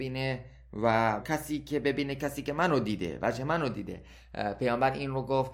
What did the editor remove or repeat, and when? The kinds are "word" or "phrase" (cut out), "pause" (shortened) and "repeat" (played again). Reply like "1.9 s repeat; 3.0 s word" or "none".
1.2 s word